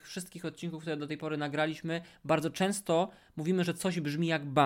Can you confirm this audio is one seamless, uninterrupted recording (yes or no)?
yes